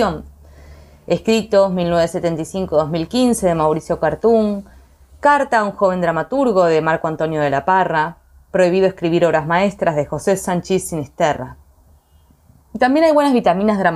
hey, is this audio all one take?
yes; 0 cuts

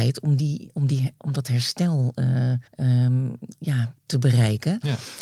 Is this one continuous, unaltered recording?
no; 2 cuts; at 2.7 s, 4.0 s

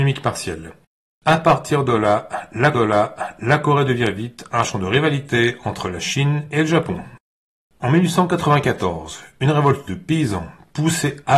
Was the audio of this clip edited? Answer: yes; 1 cut; at 2.7 s

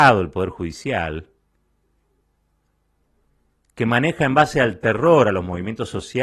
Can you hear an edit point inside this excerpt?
no; 0 cuts

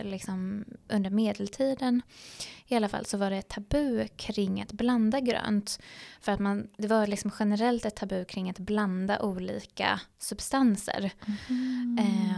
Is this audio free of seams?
yes; 0 cuts

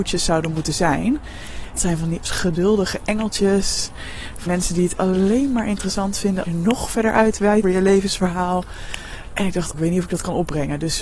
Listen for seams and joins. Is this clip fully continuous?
no; 6 cuts; at 1.8 s, 2.2 s, 4.5 s, 6.4 s, 7.6 s, 9.7 s

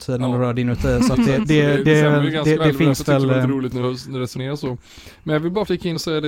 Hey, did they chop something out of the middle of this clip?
no; 0 cuts

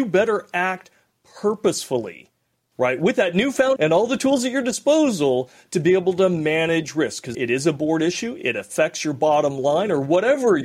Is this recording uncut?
no; 2 cuts; at 3.8 s, 7.3 s

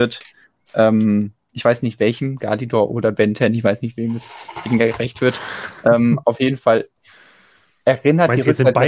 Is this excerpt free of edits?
yes; 0 cuts

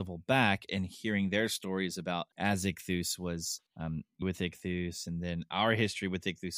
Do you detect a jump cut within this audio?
yes; 3 cuts; at 2.3 s, 3.7 s, 4.2 s

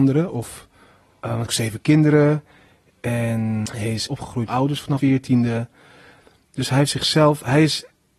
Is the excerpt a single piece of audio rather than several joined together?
no; 4 cuts; at 1.4 s, 4.1 s, 4.5 s, 5.0 s

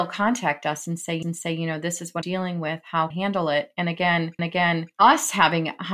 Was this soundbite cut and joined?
yes; 4 cuts; at 1.2 s, 2.2 s, 3.1 s, 4.4 s

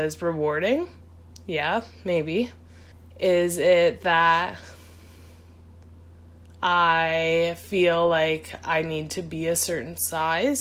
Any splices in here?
yes; 1 cut; at 2.9 s

